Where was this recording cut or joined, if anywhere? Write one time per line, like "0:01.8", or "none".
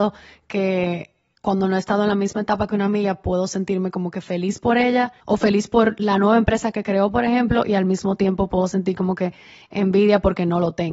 0:05.2